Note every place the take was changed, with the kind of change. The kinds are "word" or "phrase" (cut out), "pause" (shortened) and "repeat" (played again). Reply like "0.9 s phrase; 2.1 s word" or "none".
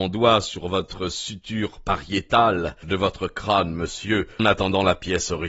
2.8 s phrase; 4.4 s word